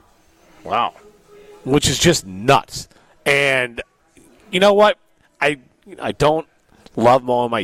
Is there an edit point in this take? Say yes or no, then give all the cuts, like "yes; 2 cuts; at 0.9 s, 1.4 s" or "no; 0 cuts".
no; 0 cuts